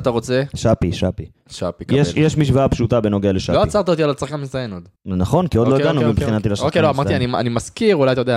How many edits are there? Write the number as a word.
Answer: one